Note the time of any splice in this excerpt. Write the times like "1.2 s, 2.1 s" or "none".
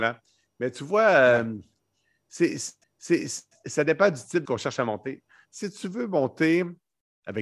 2.8 s, 4.4 s